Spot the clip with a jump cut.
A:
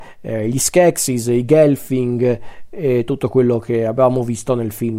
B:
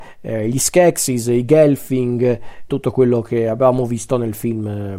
B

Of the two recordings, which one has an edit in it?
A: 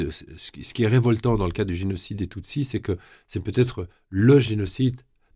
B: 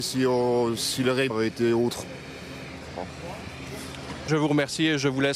B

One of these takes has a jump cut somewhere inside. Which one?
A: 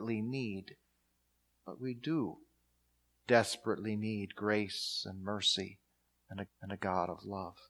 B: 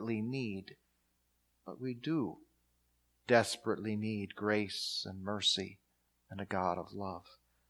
A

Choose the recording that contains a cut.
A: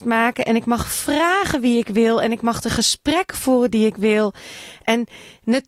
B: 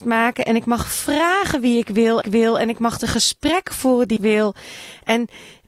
B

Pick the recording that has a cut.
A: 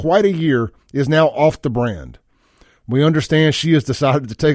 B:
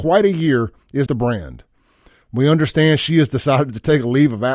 B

